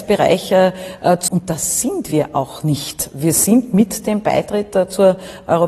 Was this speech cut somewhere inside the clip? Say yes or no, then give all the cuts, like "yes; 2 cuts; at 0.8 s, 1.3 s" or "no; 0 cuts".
yes; 1 cut; at 1.3 s